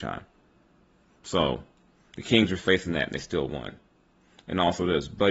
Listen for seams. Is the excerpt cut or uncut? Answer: uncut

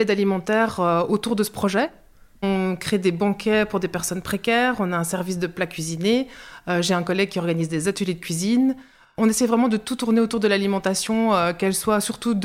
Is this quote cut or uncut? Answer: uncut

